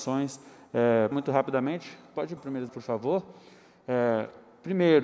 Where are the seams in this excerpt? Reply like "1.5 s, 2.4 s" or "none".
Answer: 1.1 s, 2.4 s, 2.7 s